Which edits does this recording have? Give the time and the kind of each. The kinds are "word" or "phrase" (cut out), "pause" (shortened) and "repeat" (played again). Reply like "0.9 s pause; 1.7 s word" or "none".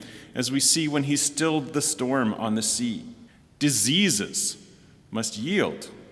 3.3 s pause